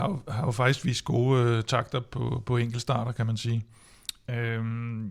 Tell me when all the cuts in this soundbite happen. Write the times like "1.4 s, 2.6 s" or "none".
none